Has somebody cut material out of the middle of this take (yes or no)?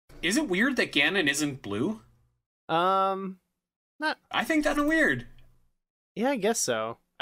yes